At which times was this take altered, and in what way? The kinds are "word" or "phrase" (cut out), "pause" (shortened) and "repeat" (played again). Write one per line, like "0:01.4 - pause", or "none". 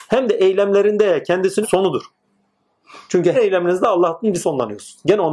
0:01.6 - word
0:03.3 - word
0:04.4 - word